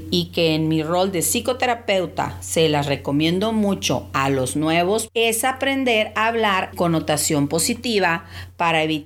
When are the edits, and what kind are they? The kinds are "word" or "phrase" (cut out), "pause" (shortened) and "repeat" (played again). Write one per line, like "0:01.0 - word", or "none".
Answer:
0:05.1 - word
0:06.7 - word

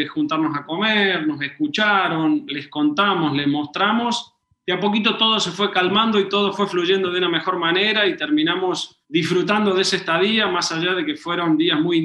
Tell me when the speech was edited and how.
0:04.4 - pause
0:09.0 - pause

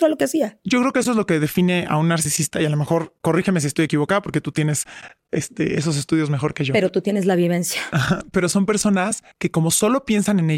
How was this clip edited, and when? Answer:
0:09.3 - pause

